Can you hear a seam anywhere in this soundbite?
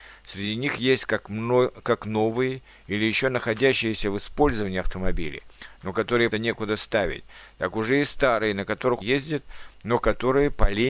yes; 2 cuts; at 6.3 s, 9.0 s

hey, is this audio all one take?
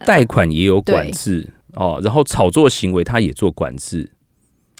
no; 1 cut; at 1.6 s

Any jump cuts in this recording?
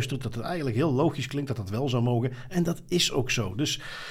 no; 0 cuts

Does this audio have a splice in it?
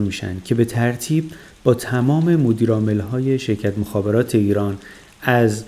no; 0 cuts

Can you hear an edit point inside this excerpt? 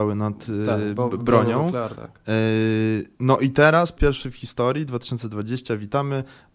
yes; 2 cuts; at 1.9 s, 4.0 s

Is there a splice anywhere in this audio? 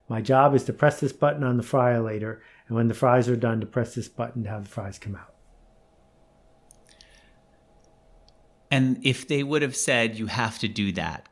no; 0 cuts

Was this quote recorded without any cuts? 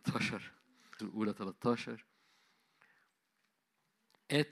no; 1 cut; at 1.0 s

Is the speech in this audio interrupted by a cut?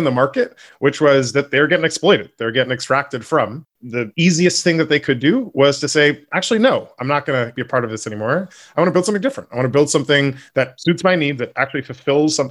no; 0 cuts

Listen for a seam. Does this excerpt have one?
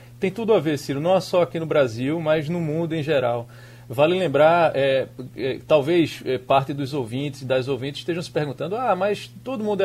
no; 0 cuts

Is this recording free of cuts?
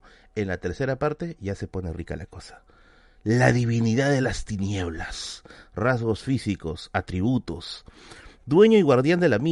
yes; 0 cuts

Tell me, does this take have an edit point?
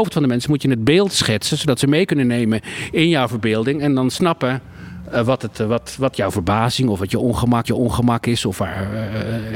yes; 1 cut; at 7.6 s

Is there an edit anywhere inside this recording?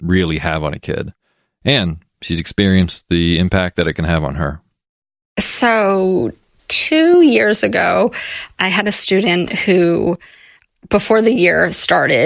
no; 0 cuts

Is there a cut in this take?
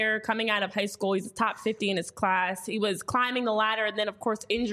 no; 0 cuts

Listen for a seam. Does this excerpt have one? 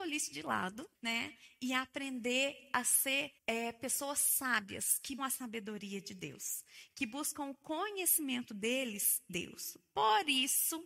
yes; 4 cuts; at 0.9 s, 3.4 s, 5.2 s, 9.3 s

